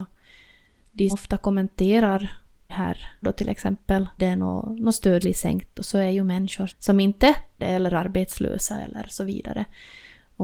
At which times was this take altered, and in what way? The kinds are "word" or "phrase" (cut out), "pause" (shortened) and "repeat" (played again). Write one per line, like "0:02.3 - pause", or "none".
0:01.1 - word
0:02.7 - word
0:03.2 - word
0:04.2 - word
0:05.2 - word
0:06.7 - word
0:07.6 - word

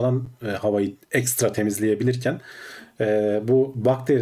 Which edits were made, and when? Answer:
none

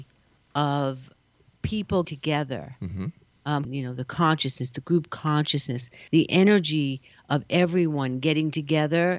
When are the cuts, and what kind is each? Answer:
0:02.0 - word
0:03.6 - phrase
0:06.1 - pause

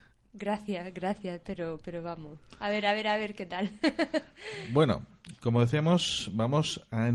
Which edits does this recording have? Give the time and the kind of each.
none

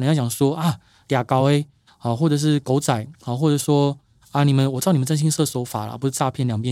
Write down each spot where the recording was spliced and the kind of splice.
none

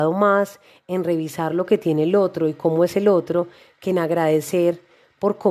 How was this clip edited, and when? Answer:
none

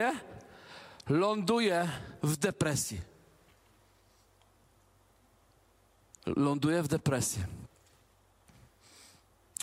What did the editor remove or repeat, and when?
0:02.2 - pause

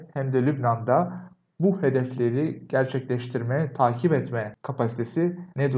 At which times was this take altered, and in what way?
none

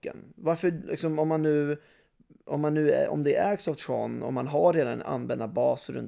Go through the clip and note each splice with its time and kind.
none

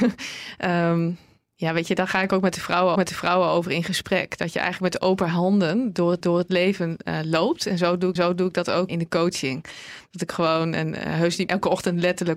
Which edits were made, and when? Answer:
0:03.0 - repeat
0:06.2 - repeat
0:08.2 - repeat
0:08.9 - word
0:11.5 - word

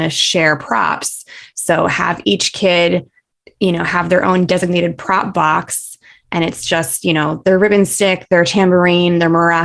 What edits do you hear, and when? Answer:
none

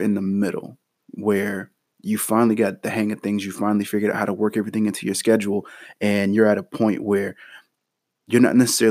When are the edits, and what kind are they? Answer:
none

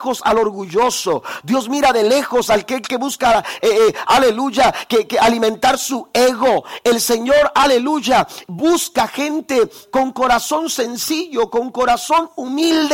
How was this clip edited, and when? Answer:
none

